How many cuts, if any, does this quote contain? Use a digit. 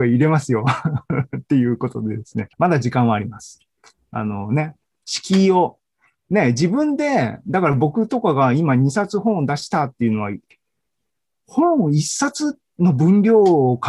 1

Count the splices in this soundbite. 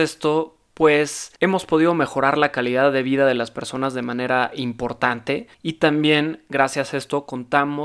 2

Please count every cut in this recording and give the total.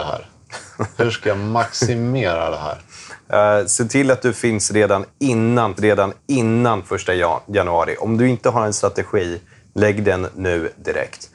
1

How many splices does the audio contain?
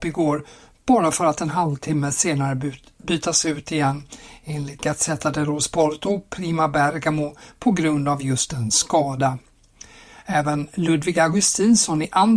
0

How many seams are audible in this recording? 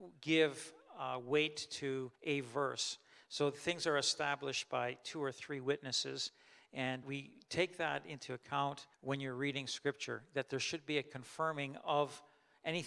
3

